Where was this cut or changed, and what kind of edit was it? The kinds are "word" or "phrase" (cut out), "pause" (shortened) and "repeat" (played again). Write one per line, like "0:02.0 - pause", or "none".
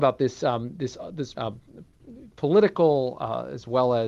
0:01.3 - word